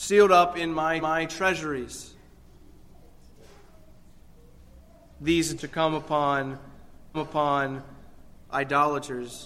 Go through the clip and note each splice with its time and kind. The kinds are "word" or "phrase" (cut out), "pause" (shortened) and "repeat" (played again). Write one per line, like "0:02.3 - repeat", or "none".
0:01.0 - repeat
0:05.6 - word
0:07.1 - repeat